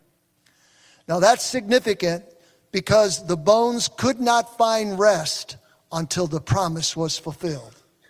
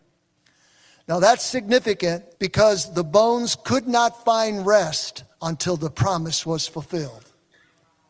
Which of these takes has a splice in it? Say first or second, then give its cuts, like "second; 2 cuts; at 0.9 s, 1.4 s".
second; 2 cuts; at 2.3 s, 5.3 s